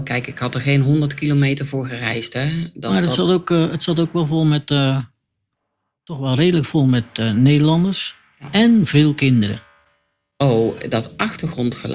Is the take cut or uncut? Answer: uncut